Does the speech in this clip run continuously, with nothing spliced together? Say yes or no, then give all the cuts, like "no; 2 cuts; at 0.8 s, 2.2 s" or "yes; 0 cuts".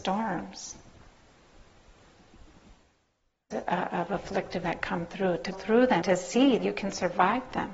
no; 5 cuts; at 3.5 s, 4.6 s, 5.5 s, 6.0 s, 6.6 s